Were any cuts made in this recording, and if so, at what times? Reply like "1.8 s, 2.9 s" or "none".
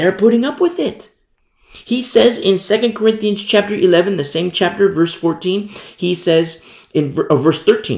none